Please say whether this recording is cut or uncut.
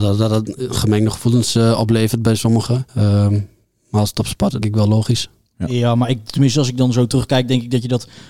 cut